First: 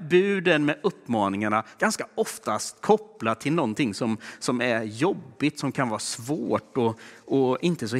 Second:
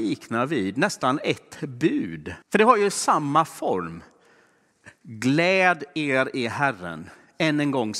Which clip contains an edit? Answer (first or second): second